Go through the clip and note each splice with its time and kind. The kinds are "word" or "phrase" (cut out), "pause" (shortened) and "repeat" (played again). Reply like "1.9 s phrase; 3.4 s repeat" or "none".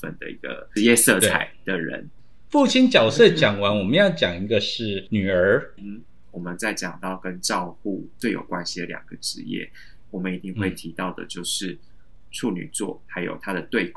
5.8 s word; 13.0 s word